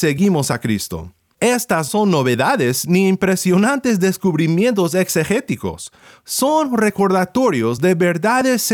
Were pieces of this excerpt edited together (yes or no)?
yes